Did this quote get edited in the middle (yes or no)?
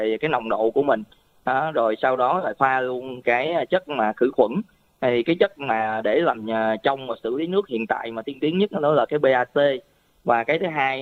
no